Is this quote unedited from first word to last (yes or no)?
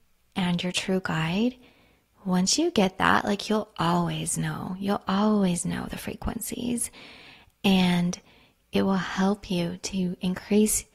yes